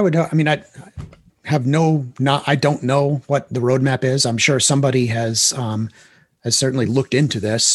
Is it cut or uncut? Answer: cut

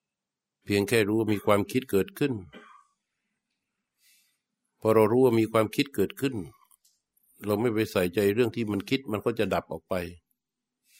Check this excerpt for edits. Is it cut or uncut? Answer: uncut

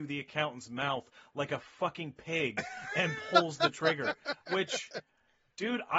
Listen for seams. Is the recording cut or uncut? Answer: uncut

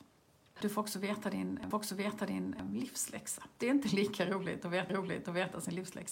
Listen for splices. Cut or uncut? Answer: cut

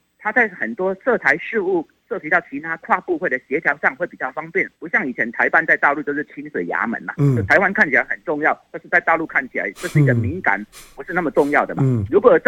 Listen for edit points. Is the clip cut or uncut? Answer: cut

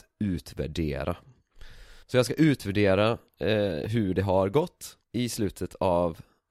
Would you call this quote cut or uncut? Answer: cut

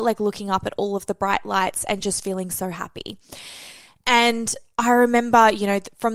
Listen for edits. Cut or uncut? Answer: uncut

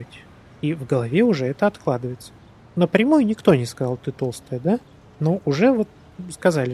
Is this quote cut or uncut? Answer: uncut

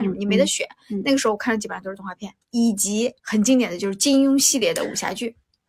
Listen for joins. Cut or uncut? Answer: cut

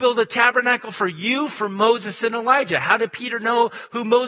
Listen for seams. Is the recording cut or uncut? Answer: uncut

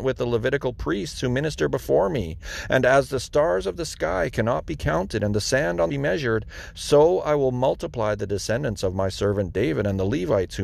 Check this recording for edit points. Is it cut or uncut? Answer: cut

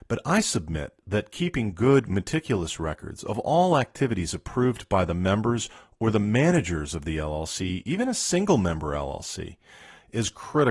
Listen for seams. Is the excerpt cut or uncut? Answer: uncut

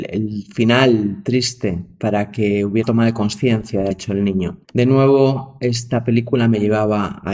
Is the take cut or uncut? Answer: cut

